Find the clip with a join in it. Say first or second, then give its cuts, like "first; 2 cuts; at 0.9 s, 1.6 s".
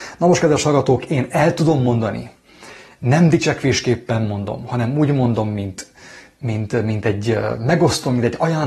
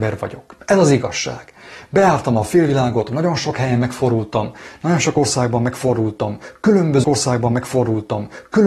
second; 1 cut; at 7.0 s